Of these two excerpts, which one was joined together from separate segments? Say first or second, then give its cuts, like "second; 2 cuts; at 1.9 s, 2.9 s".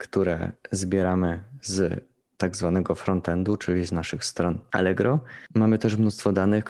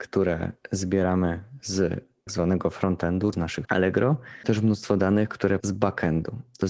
second; 5 cuts; at 2.3 s, 3.3 s, 3.6 s, 4.4 s, 5.6 s